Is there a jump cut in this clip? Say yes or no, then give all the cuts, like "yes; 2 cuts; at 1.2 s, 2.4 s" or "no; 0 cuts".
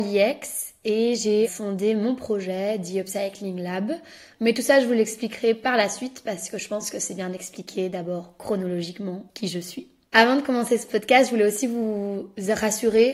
no; 0 cuts